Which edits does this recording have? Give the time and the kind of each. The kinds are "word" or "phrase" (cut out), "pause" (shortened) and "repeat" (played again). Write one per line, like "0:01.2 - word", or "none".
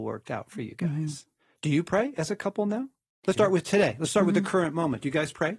0:03.3 - word

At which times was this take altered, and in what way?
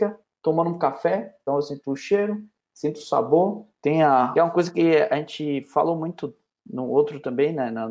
0:01.5 - word
0:03.7 - pause
0:04.4 - phrase

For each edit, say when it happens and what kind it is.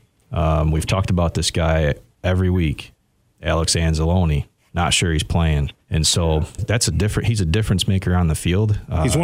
0:04.6 - pause
0:05.8 - pause
0:06.6 - word

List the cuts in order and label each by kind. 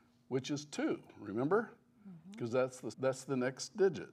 0:02.9 - word

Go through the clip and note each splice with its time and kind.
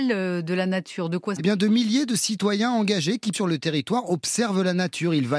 0:01.4 - word
0:03.3 - word

